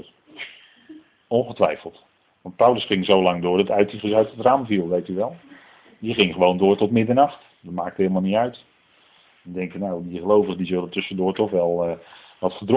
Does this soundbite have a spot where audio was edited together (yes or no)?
no